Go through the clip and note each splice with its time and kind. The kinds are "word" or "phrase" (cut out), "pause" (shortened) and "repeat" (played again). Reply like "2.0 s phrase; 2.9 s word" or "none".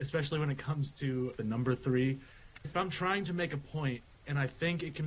1.4 s phrase; 2.7 s word